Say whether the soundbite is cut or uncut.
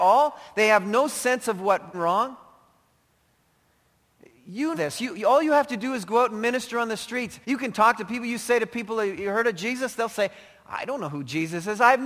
cut